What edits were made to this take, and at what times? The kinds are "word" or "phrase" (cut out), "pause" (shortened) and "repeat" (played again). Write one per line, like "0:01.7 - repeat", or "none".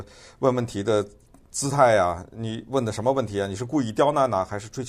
none